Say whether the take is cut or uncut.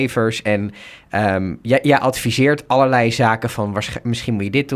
uncut